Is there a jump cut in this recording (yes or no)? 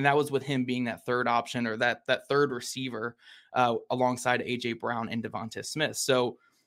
no